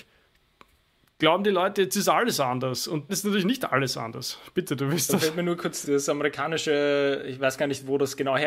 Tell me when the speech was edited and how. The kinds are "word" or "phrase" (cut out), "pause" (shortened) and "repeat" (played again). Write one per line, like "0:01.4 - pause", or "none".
0:03.1 - word
0:05.8 - word